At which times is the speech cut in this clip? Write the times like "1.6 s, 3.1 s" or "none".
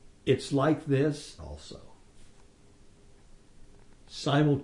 1.4 s